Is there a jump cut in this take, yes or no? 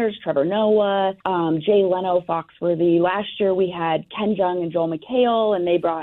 yes